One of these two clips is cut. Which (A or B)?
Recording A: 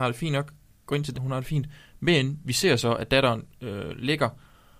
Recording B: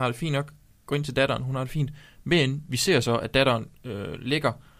A